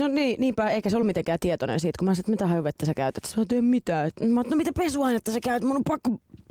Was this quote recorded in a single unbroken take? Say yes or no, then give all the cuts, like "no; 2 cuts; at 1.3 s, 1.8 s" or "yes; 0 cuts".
yes; 0 cuts